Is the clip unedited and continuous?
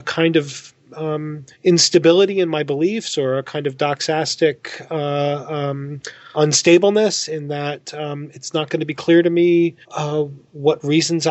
no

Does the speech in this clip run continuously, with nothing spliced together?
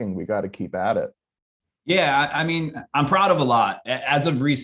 yes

